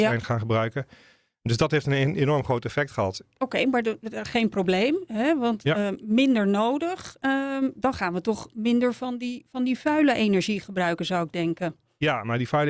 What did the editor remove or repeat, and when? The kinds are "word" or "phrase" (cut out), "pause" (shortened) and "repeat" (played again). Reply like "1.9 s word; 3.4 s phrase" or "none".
none